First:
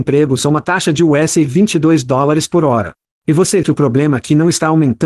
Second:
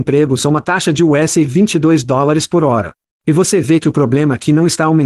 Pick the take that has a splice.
first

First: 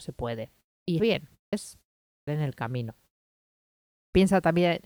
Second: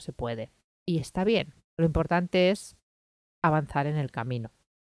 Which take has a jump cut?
first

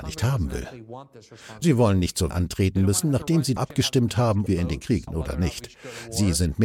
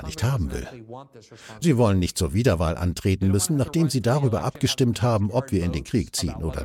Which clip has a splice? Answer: first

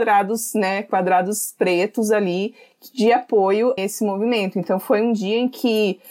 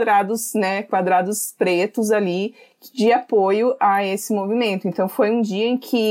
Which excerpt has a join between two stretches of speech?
first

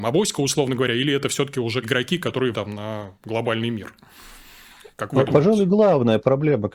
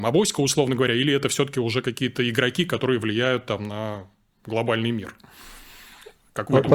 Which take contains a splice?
first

